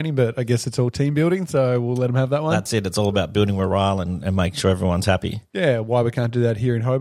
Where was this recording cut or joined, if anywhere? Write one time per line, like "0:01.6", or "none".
none